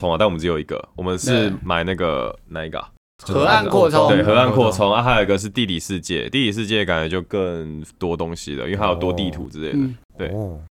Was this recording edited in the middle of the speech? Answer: no; 0 cuts

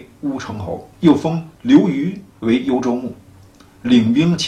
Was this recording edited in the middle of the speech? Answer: yes; 3 cuts; at 0.9 s, 1.5 s, 2.3 s

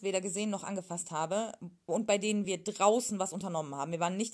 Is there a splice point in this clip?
no; 0 cuts

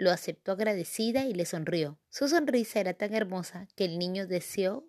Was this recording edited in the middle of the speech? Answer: yes; 1 cut; at 2.0 s

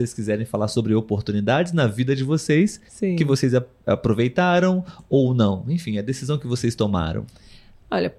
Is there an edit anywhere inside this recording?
yes; 1 cut; at 2.9 s

